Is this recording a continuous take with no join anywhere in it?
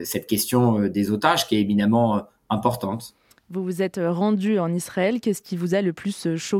yes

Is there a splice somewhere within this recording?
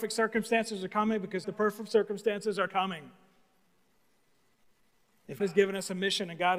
yes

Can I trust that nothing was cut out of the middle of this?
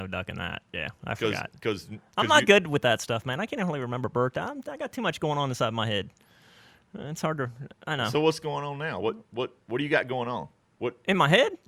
yes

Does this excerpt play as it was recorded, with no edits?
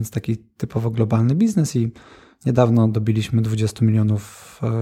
yes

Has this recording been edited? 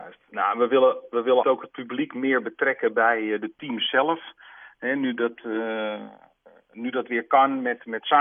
yes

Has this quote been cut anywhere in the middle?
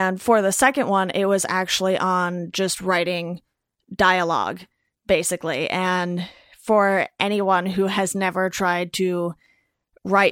no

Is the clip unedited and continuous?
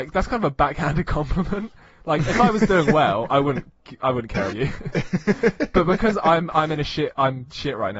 no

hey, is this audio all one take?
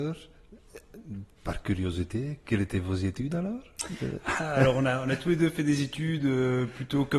yes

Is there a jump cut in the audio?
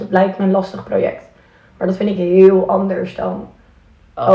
no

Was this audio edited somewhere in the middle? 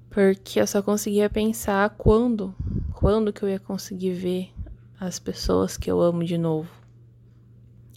no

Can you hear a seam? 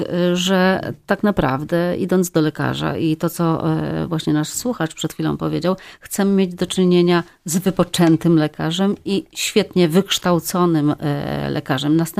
no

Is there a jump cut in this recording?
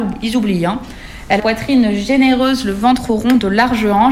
yes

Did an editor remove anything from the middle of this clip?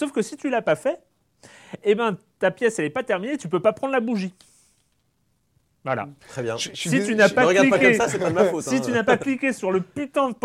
yes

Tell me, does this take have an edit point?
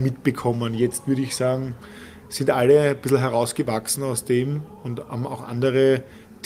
no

